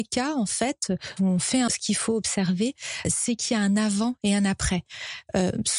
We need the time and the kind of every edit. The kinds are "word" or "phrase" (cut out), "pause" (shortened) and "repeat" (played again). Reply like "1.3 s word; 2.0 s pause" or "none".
1.2 s word; 1.7 s word; 3.0 s word